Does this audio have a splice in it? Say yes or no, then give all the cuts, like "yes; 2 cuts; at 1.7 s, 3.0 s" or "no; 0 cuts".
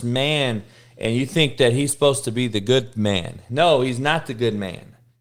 no; 0 cuts